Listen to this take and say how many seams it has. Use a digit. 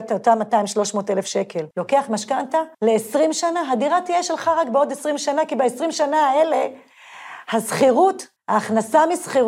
3